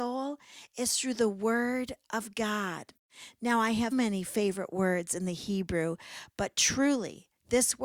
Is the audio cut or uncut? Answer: cut